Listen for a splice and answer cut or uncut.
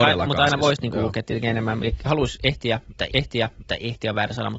cut